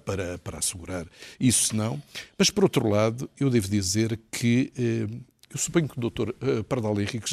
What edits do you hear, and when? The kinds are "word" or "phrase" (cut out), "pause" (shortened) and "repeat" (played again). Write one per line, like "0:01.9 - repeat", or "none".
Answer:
none